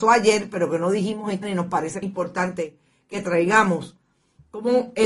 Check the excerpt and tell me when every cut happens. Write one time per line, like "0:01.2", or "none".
0:01.4
0:02.0